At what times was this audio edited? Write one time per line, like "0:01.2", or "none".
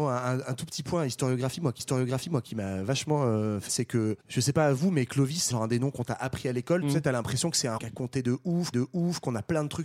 0:01.8
0:03.7
0:04.2
0:05.5
0:07.8
0:08.7